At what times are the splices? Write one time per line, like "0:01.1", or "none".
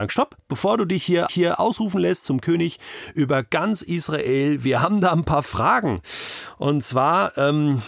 0:01.3